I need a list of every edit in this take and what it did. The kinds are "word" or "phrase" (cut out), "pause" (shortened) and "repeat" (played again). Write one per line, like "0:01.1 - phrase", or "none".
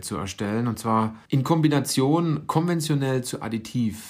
0:01.2 - pause